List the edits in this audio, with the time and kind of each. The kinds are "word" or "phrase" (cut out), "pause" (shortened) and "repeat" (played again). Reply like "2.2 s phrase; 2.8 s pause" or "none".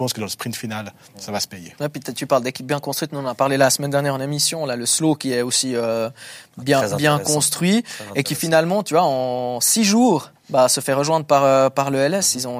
10.4 s pause